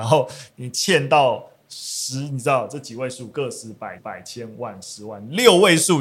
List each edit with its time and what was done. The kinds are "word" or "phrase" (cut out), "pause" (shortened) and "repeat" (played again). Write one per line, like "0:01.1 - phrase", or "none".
0:04.0 - repeat